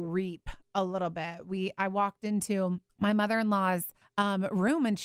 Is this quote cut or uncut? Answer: cut